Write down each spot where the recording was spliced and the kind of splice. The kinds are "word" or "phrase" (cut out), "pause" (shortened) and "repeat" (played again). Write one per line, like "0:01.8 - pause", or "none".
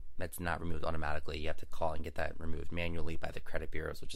none